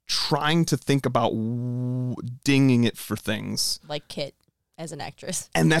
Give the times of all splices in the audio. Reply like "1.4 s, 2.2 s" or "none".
none